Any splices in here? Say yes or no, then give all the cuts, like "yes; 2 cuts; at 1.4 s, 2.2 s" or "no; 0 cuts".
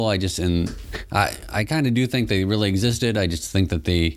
no; 0 cuts